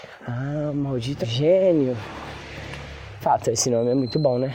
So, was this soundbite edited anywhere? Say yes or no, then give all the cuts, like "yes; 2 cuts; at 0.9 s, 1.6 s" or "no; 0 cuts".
yes; 2 cuts; at 1.2 s, 3.2 s